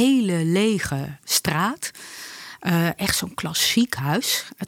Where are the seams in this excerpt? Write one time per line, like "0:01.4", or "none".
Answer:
none